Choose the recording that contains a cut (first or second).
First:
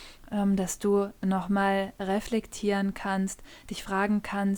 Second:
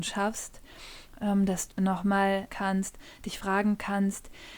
second